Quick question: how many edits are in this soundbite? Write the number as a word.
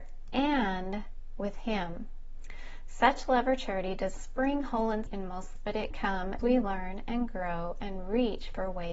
five